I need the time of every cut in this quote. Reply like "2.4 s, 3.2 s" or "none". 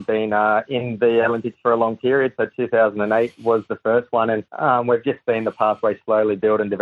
4.5 s